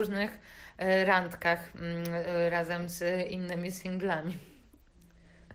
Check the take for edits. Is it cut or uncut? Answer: uncut